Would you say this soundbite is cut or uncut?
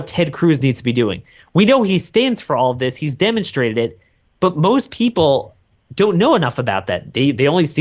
uncut